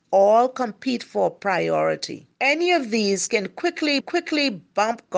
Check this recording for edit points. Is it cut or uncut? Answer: cut